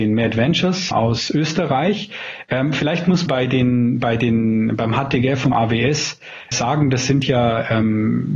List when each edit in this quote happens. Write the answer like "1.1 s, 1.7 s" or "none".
0.9 s, 3.3 s, 5.5 s, 6.5 s